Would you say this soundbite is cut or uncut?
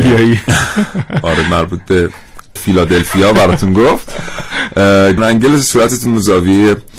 cut